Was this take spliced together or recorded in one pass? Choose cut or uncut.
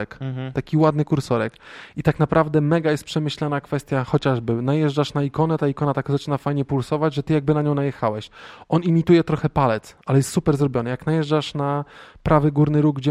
uncut